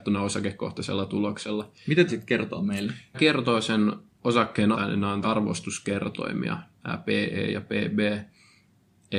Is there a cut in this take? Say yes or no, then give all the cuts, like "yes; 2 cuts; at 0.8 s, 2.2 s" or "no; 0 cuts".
yes; 4 cuts; at 2.1 s, 3.1 s, 4.7 s, 5.2 s